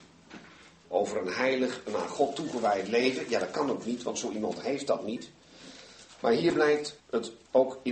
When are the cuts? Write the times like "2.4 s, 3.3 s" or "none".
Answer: 7.0 s